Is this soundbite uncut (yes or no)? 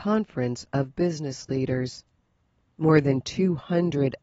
yes